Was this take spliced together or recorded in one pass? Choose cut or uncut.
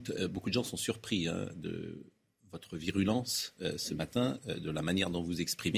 uncut